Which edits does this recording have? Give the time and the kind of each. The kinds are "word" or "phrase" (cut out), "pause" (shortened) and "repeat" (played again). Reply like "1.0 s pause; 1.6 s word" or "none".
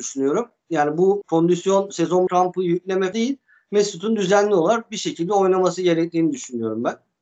1.2 s word; 2.3 s phrase; 3.1 s word